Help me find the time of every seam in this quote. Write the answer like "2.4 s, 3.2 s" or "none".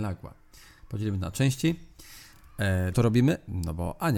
2.9 s